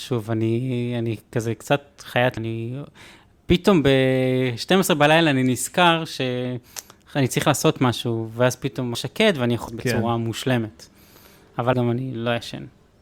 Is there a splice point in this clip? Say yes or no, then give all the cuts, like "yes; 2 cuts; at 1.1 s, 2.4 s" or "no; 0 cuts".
yes; 4 cuts; at 2.4 s, 8.9 s, 9.7 s, 11.7 s